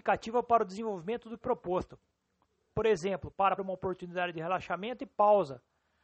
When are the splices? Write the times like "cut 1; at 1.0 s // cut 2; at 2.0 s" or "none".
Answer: cut 1; at 1.4 s // cut 2; at 3.6 s